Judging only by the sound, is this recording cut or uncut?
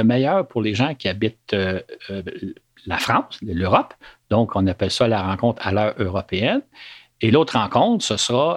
uncut